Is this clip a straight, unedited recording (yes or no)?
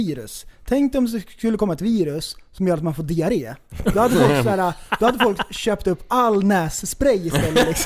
yes